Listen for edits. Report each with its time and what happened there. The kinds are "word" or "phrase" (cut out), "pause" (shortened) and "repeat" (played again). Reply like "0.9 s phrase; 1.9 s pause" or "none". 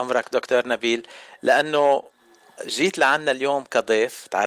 2.6 s word